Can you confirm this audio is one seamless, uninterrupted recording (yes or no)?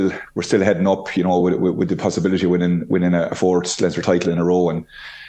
yes